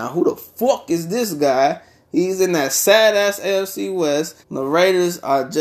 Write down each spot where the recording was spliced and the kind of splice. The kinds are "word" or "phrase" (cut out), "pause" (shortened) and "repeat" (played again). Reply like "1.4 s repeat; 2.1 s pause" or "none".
4.4 s pause

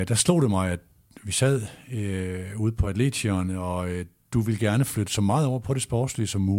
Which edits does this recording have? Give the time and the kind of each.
none

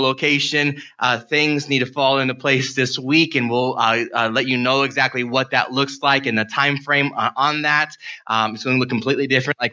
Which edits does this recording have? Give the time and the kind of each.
none

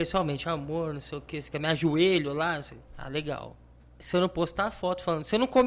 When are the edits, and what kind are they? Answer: 2.9 s pause; 3.8 s pause

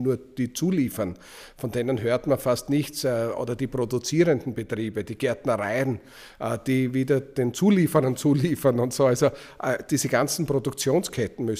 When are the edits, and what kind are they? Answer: none

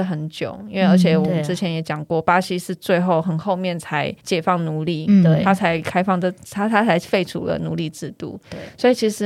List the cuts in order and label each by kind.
4.2 s pause

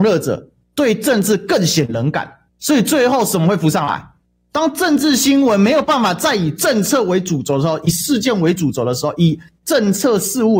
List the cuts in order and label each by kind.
none

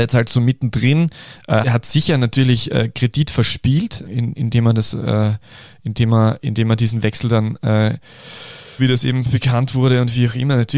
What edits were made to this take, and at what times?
1.6 s word; 4.0 s word; 8.8 s word

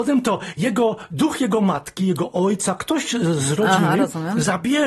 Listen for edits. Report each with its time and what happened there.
none

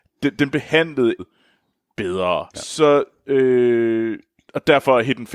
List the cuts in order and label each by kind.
1.2 s word; 2.5 s pause

